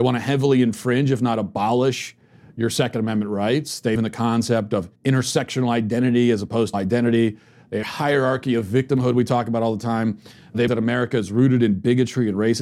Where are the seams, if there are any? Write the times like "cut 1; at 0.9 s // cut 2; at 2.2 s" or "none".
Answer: cut 1; at 4.0 s // cut 2; at 4.9 s // cut 3; at 6.7 s // cut 4; at 7.8 s // cut 5; at 10.7 s